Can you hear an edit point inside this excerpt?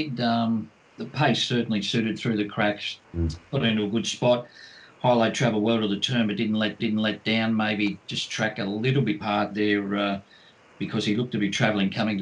yes; 3 cuts; at 3.0 s, 6.8 s, 9.2 s

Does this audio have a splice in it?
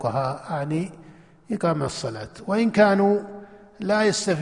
no; 0 cuts

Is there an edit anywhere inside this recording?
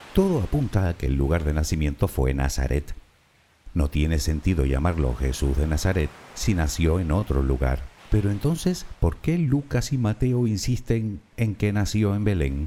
yes; 1 cut; at 8.0 s

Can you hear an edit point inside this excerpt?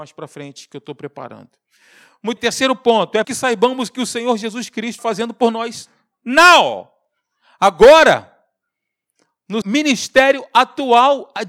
yes; 4 cuts; at 2.4 s, 3.2 s, 5.0 s, 9.6 s

